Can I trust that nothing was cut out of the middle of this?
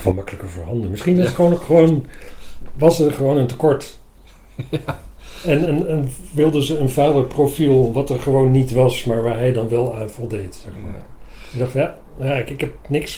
no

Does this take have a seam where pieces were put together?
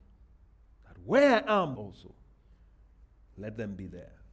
yes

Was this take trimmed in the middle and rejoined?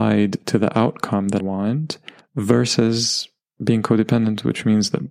yes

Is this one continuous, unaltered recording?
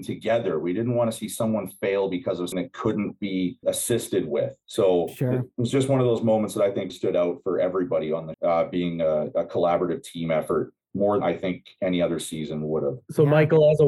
no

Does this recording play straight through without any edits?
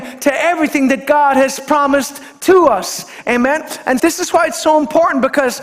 no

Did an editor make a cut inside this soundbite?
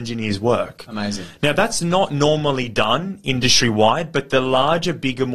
no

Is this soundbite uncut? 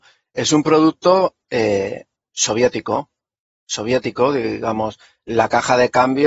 yes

